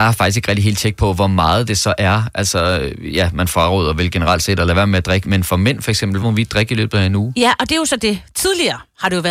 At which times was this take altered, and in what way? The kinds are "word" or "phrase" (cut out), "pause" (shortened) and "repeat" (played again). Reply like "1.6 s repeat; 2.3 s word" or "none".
5.2 s word; 6.2 s word